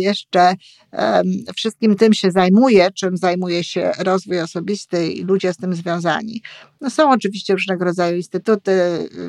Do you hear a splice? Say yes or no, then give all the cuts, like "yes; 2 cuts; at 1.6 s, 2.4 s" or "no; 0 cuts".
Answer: no; 0 cuts